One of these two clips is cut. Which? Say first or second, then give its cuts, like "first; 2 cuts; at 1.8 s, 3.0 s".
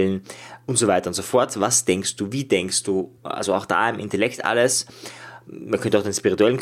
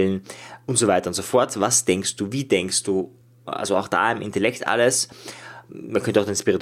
first; 1 cut; at 3.2 s